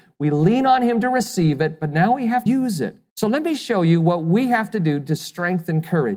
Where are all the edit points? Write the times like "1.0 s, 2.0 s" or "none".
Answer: 2.5 s, 3.1 s